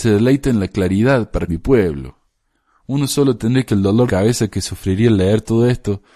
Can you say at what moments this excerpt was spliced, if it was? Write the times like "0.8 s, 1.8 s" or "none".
1.5 s, 3.7 s, 4.1 s